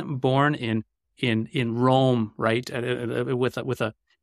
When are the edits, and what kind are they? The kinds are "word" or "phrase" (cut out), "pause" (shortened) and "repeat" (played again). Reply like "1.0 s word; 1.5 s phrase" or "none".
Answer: none